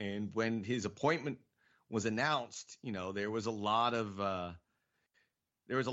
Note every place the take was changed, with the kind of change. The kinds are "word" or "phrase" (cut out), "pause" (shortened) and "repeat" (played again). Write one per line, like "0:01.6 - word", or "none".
none